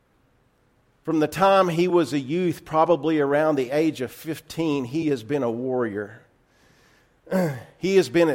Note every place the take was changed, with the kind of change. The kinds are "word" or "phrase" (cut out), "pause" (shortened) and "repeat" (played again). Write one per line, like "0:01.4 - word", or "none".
none